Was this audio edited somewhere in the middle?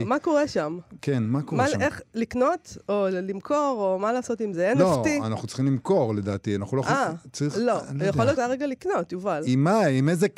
yes; 1 cut; at 8.4 s

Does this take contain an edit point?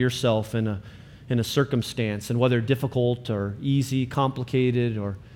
no; 0 cuts

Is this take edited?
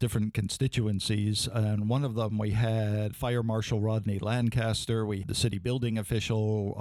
yes; 2 cuts; at 3.1 s, 5.2 s

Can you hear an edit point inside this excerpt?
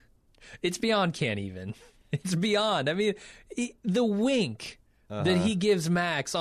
no; 0 cuts

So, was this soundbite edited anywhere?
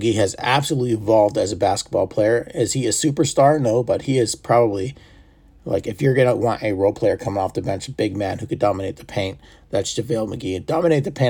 no; 0 cuts

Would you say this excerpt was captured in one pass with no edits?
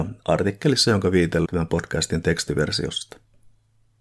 no; 1 cut; at 1.4 s

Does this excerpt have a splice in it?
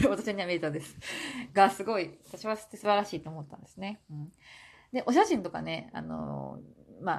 no; 0 cuts

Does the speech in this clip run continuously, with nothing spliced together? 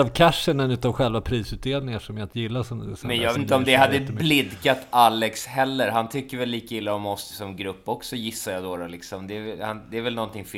no; 2 cuts; at 3.3 s, 7.3 s

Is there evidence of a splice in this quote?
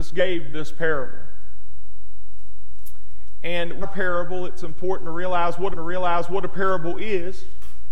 yes; 2 cuts; at 3.8 s, 5.7 s

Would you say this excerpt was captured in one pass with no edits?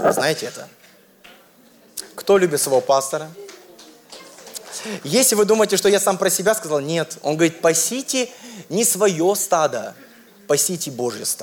yes; 0 cuts

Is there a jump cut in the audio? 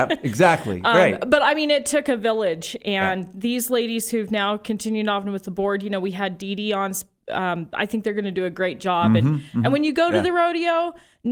no; 0 cuts

